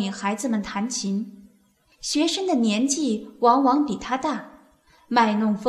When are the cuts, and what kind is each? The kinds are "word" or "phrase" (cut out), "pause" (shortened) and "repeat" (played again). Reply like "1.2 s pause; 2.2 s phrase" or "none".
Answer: none